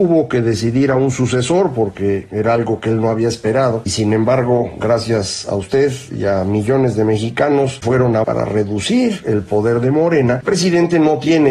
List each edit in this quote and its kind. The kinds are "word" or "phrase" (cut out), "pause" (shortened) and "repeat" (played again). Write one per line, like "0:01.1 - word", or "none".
0:03.9 - word
0:07.8 - word
0:08.2 - word
0:10.4 - word